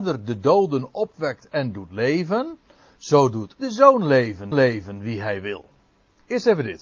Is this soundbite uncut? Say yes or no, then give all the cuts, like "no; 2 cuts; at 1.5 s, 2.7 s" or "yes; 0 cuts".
no; 2 cuts; at 3.6 s, 4.5 s